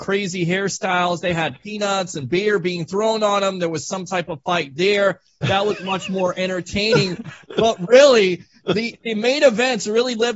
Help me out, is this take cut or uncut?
uncut